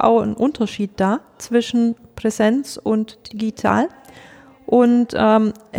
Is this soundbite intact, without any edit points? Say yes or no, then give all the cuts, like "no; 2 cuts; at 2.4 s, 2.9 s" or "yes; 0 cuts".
yes; 0 cuts